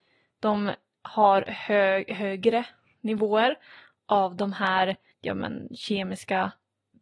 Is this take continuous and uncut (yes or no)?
yes